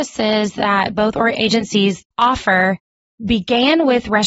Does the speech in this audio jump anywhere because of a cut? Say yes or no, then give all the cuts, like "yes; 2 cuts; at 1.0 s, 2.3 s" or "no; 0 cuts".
yes; 1 cut; at 2.1 s